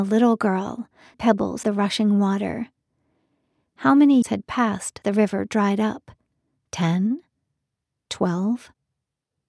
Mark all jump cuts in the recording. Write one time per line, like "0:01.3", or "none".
0:01.1
0:01.6
0:04.2
0:05.0